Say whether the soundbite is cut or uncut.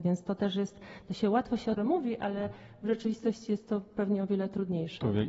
cut